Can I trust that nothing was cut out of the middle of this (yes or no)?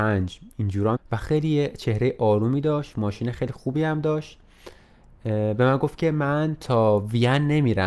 no